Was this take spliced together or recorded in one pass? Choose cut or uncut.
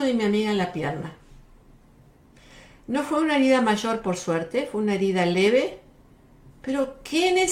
uncut